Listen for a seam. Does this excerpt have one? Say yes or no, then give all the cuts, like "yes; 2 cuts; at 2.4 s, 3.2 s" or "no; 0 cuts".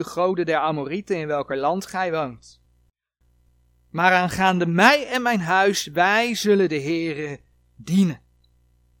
no; 0 cuts